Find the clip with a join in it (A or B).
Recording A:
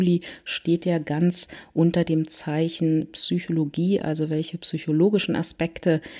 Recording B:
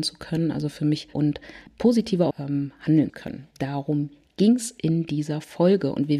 B